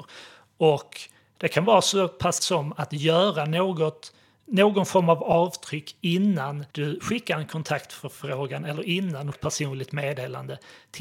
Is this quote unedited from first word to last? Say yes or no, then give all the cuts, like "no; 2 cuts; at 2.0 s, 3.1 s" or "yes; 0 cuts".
no; 3 cuts; at 2.4 s, 6.7 s, 9.3 s